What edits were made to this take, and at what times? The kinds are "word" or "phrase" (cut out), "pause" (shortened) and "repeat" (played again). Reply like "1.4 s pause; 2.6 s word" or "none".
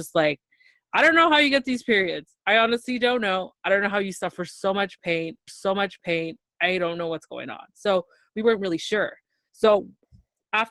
5.5 s repeat